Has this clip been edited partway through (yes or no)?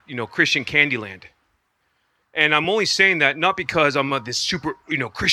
no